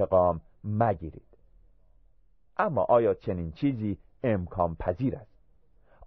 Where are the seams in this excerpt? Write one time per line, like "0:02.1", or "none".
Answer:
none